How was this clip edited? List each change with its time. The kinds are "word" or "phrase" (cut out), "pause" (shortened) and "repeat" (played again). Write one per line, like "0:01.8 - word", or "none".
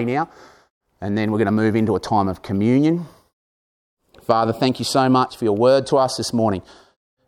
none